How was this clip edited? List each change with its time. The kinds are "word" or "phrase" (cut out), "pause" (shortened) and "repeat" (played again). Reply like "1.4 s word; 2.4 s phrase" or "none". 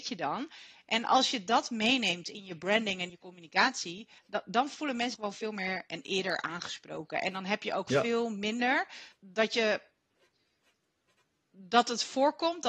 3.1 s word; 4.2 s pause; 5.1 s word; 9.1 s phrase